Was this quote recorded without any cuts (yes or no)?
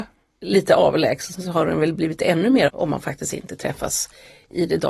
no